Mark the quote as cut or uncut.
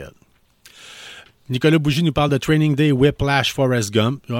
uncut